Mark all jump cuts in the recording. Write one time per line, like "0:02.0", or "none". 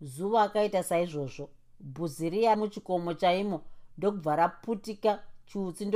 0:02.5

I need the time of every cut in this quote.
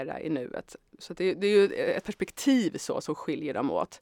none

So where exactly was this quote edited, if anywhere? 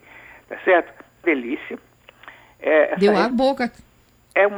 0:01.2
0:03.3

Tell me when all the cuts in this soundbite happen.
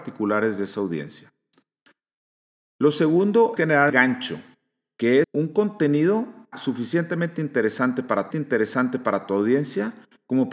0:03.6
0:03.9
0:05.2
0:06.5
0:08.3

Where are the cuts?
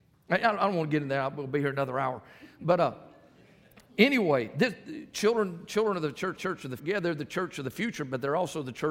0:03.9
0:06.4
0:06.8

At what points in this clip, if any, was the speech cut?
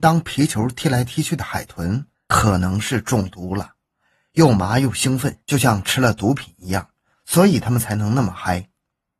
0:02.1
0:05.4

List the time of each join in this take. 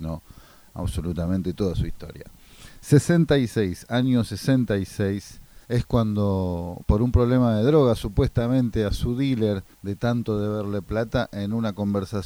0:05.6
0:09.7

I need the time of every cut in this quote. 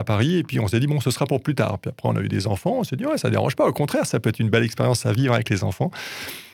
none

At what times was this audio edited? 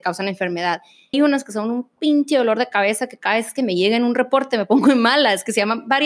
0:01.1

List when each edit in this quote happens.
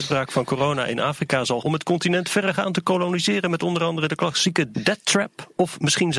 0:01.6

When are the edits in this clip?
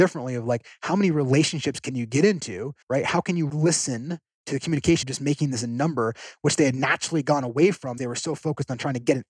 0:02.8
0:03.5
0:05.0
0:08.0

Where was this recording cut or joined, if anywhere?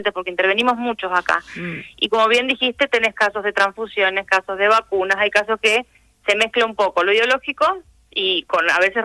0:04.3

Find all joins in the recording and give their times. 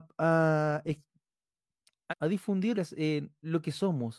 0:02.1
0:02.7

